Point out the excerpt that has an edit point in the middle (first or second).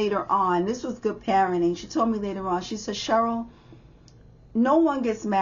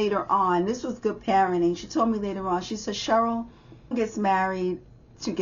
second